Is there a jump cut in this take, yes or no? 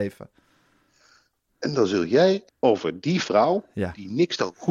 yes